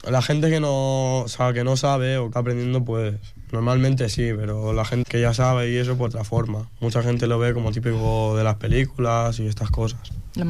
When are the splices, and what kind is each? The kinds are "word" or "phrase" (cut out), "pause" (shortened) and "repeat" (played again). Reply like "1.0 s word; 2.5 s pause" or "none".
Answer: 2.3 s phrase; 5.0 s word; 6.1 s phrase

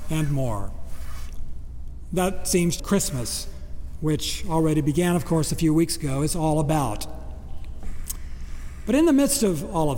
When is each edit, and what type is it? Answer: 2.8 s phrase

